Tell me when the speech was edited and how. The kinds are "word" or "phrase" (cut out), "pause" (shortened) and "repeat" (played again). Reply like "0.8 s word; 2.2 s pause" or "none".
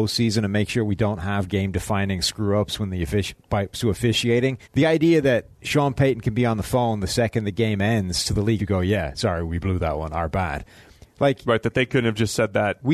3.7 s phrase; 4.6 s pause; 5.5 s pause; 8.6 s word

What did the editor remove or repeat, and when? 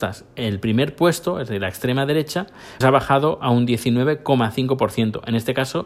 2.8 s word

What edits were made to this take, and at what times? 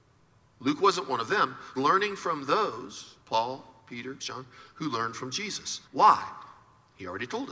1.7 s phrase; 3.2 s pause; 4.2 s word; 5.8 s pause

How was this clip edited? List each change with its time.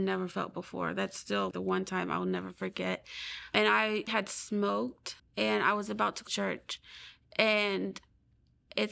1.5 s word; 4.1 s word; 5.2 s pause; 6.3 s word

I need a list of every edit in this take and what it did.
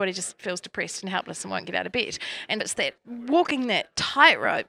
2.6 s word; 3.0 s word

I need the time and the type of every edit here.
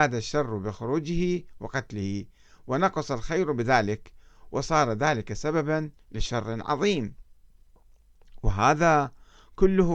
6.0 s pause

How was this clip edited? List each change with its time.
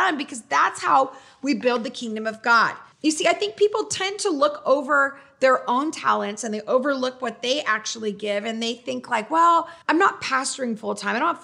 2.9 s pause; 9.8 s pause

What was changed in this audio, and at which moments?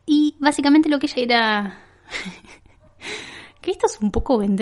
1.1 s word; 2.6 s pause

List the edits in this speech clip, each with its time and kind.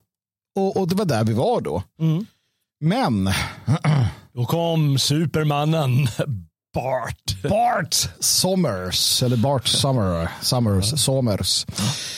none

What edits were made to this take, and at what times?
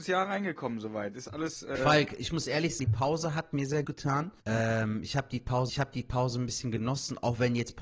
1.8 s word; 2.8 s word; 3.8 s word; 4.4 s pause; 5.7 s repeat

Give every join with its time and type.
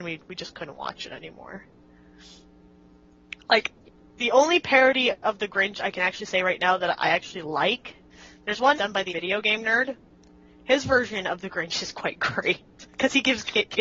8.7 s word; 9.1 s word

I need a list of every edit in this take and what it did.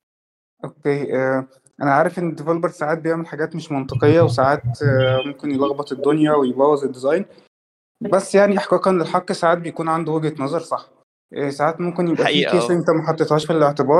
none

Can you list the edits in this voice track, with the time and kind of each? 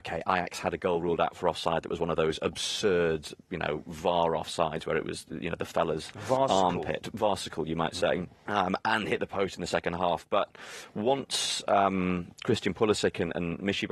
none

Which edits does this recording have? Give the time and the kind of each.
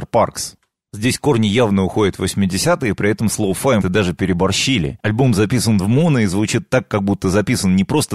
3.8 s word

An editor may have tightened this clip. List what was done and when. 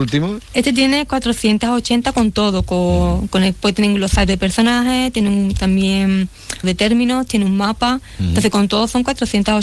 6.6 s word

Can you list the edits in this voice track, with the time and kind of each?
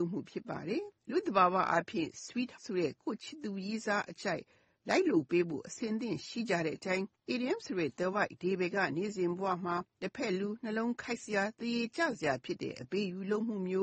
1.0 s pause; 2.6 s word; 7.2 s pause; 9.9 s pause

